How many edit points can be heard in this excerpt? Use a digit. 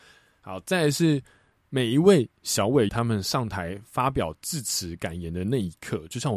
1